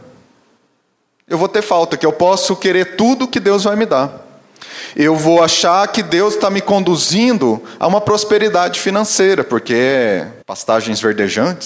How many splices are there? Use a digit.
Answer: 1